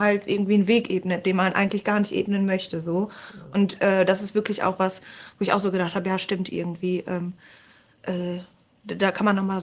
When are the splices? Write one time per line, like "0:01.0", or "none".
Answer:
none